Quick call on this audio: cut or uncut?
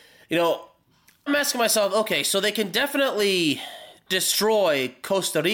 cut